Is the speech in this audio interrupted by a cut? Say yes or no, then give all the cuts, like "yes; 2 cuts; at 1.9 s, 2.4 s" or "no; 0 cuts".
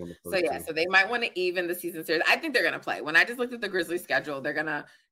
no; 0 cuts